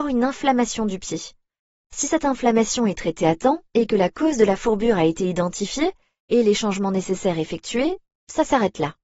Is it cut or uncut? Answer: uncut